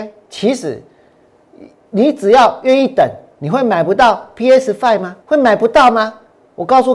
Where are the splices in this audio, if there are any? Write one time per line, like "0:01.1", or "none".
0:05.2